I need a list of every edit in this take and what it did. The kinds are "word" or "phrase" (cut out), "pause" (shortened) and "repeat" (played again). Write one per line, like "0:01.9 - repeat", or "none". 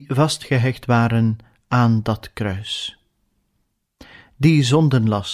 none